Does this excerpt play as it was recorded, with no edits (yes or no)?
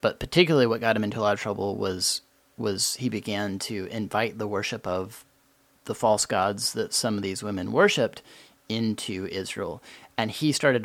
yes